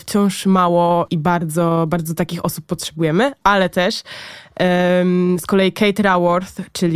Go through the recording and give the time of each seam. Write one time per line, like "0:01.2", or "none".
0:01.1